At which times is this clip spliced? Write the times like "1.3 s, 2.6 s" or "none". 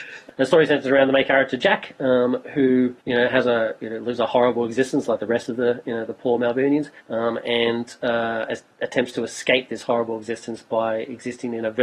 3.0 s, 7.0 s, 8.7 s